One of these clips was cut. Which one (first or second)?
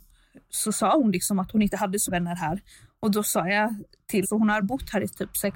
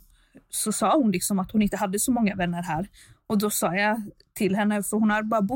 first